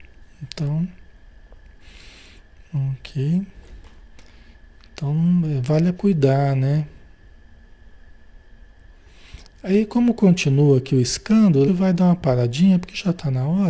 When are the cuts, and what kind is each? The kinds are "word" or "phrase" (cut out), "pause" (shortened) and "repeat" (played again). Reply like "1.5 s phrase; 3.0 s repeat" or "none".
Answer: 6.0 s phrase; 11.7 s phrase